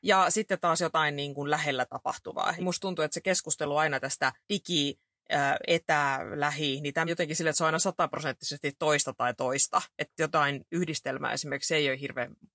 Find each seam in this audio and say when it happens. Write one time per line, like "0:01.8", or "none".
0:02.6
0:04.4
0:07.1

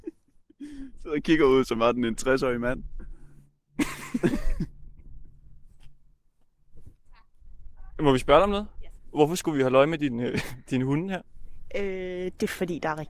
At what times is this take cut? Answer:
none

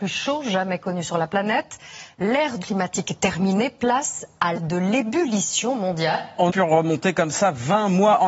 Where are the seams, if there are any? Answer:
0:02.6
0:04.5
0:06.5

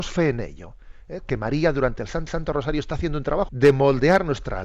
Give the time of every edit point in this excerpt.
0:02.3
0:03.5

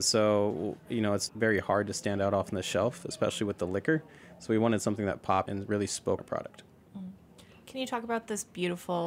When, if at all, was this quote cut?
0:01.3
0:05.5
0:06.2

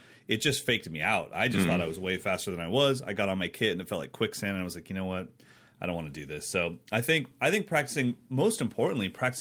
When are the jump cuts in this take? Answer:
none

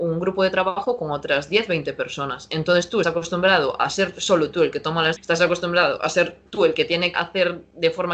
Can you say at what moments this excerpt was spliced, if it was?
0:03.0
0:05.2
0:06.5
0:07.1

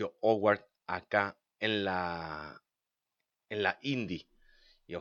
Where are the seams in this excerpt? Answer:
none

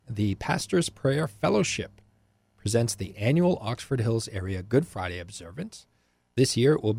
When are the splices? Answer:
none

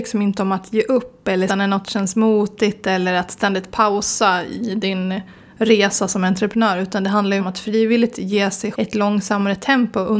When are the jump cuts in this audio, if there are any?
0:01.5
0:07.4
0:08.7

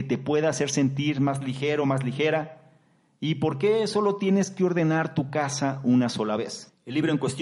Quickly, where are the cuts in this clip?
none

